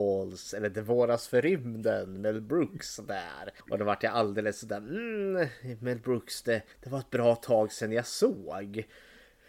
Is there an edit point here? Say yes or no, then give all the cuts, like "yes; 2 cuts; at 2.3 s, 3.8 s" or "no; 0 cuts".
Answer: yes; 2 cuts; at 3.6 s, 6.7 s